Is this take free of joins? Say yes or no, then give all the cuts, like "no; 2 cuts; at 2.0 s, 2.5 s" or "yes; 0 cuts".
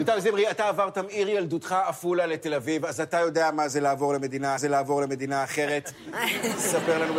no; 1 cut; at 4.6 s